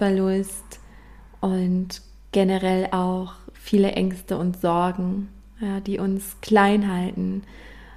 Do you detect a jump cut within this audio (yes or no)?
no